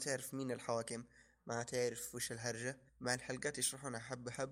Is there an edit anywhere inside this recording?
yes; 1 cut; at 2.9 s

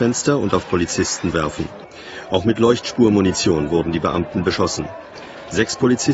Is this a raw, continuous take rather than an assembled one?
no; 1 cut; at 1.3 s

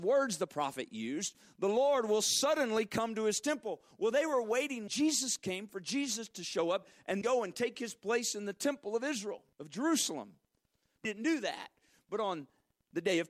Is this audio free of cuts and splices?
no; 4 cuts; at 4.9 s, 7.2 s, 9.5 s, 11.0 s

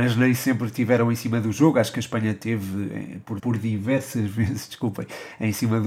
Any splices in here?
yes; 1 cut; at 3.4 s

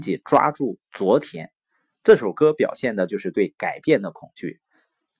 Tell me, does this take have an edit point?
no; 0 cuts

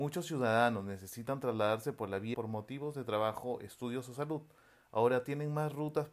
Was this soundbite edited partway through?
yes; 1 cut; at 2.3 s

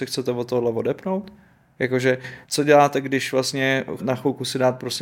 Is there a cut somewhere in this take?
yes; 2 cuts; at 2.4 s, 4.0 s

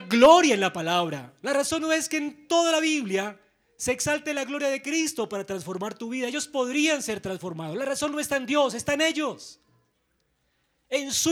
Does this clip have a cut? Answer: no; 0 cuts

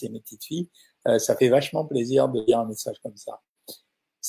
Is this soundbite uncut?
yes; 0 cuts

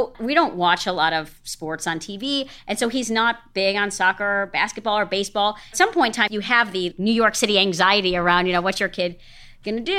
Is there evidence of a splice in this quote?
no; 0 cuts

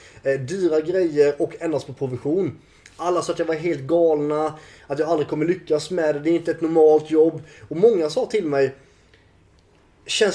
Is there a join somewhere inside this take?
no; 0 cuts

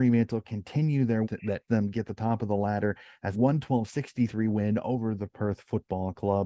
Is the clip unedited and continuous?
no; 3 cuts; at 1.2 s, 1.7 s, 3.3 s

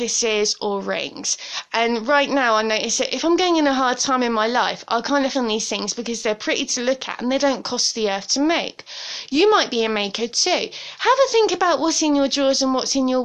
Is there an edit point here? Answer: yes; 1 cut; at 5.3 s

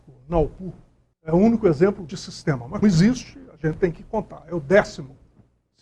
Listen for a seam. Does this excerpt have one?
yes; 2 cuts; at 2.1 s, 2.8 s

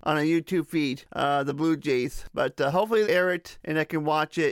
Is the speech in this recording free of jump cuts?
no; 1 cut; at 3.0 s

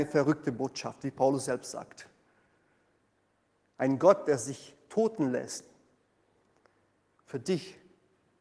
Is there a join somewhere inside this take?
no; 0 cuts

